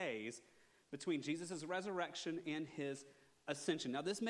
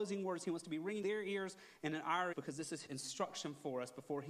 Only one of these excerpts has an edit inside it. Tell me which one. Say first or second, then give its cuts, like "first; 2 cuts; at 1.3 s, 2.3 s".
second; 3 cuts; at 1.0 s, 2.3 s, 2.9 s